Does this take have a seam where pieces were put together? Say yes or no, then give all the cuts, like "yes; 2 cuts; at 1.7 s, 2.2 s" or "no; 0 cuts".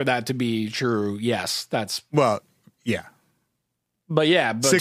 no; 0 cuts